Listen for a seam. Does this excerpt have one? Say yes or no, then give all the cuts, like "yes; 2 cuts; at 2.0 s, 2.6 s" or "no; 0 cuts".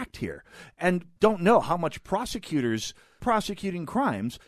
yes; 2 cuts; at 1.2 s, 3.2 s